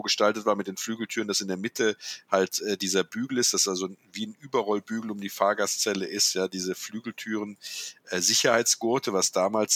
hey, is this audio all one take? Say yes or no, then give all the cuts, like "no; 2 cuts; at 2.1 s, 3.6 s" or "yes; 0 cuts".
yes; 0 cuts